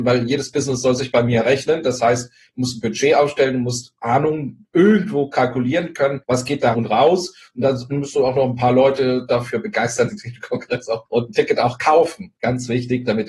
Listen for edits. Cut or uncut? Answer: cut